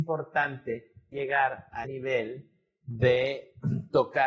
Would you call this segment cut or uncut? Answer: cut